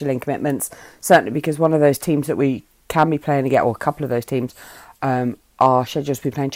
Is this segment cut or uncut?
uncut